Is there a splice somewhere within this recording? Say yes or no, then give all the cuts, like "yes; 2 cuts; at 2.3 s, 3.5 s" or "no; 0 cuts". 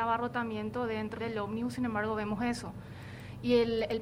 yes; 1 cut; at 1.2 s